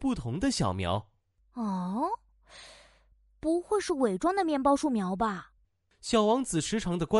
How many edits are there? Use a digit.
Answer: 0